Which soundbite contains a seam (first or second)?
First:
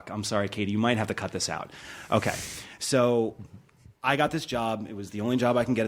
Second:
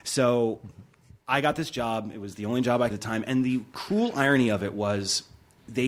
second